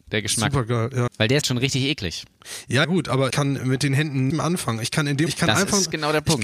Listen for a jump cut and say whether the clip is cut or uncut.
cut